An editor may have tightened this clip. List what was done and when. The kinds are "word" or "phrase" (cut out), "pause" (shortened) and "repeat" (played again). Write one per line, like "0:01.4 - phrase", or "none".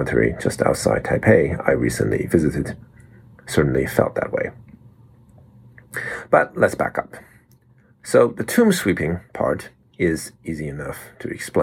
none